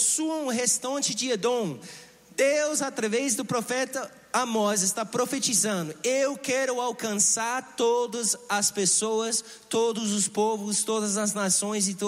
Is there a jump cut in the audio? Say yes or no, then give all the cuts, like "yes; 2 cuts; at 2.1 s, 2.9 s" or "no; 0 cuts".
no; 0 cuts